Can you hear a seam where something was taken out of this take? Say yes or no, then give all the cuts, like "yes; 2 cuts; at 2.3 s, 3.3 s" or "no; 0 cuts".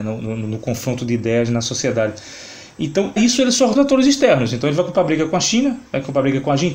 yes; 2 cuts; at 3.2 s, 3.7 s